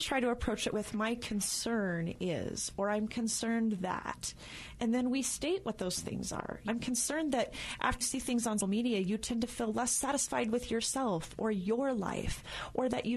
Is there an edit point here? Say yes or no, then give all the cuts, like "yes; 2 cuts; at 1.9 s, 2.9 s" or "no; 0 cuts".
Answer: yes; 3 cuts; at 6.7 s, 8.0 s, 8.6 s